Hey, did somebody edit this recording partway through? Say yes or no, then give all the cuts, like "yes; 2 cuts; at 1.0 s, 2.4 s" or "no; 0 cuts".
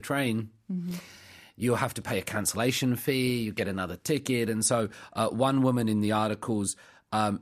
no; 0 cuts